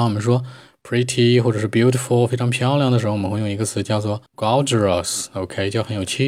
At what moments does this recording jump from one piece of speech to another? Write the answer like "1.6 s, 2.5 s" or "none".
4.3 s